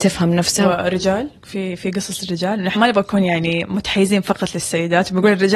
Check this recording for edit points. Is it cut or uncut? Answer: cut